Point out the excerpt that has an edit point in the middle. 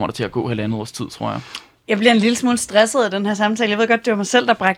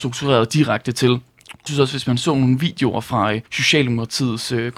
second; 2 cuts; at 1.7 s, 3.5 s

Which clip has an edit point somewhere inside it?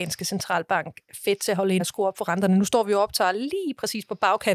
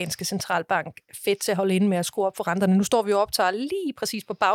first; 1 cut; at 1.8 s

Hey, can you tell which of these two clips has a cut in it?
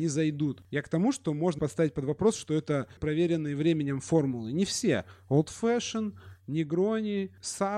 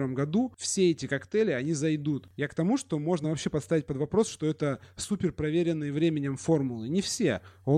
first; 2 cuts; at 1.6 s, 3.0 s

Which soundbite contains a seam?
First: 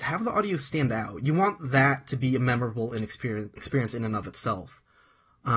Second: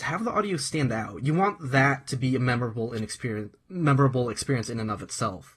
first; 1 cut; at 3.6 s

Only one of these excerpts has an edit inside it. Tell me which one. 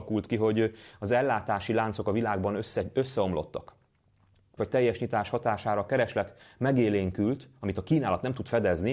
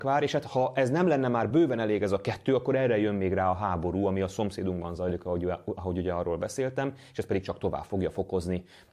first; 1 cut; at 4.6 s

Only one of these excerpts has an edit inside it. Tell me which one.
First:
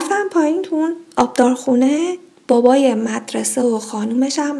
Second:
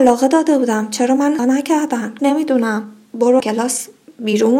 second; 3 cuts; at 1.4 s, 2.2 s, 3.4 s

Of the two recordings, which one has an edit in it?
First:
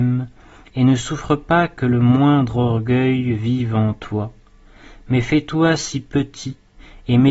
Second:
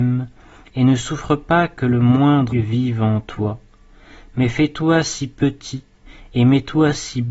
second; 1 cut; at 2.5 s

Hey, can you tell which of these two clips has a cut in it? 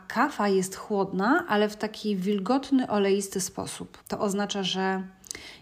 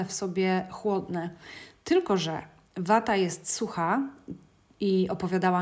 first; 1 cut; at 4.0 s

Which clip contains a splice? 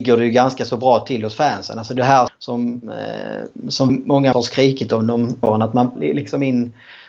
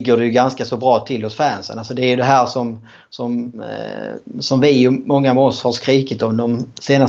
first; 6 cuts; at 2.0 s, 2.3 s, 3.9 s, 4.3 s, 5.4 s, 6.0 s

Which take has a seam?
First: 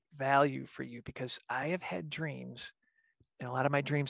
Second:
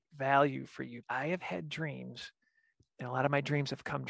second; 1 cut; at 1.0 s

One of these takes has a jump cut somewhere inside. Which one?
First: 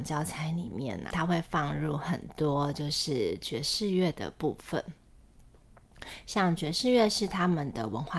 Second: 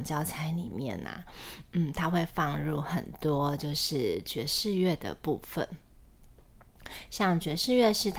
first; 1 cut; at 1.1 s

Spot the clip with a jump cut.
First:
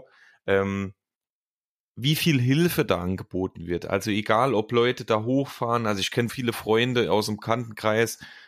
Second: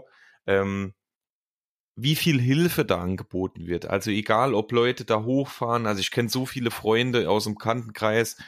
first; 1 cut; at 6.3 s

